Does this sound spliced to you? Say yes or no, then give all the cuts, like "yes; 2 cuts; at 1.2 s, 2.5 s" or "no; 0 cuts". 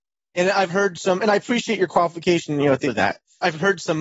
yes; 1 cut; at 2.9 s